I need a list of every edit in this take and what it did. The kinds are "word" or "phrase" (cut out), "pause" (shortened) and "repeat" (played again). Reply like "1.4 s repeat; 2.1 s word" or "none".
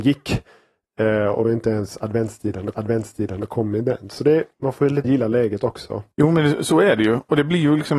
1.4 s word; 2.7 s repeat; 4.5 s pause; 5.0 s word; 6.1 s pause